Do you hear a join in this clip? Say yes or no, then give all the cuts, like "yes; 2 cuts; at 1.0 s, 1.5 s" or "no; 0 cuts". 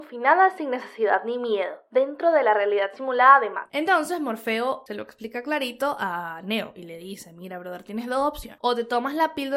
no; 0 cuts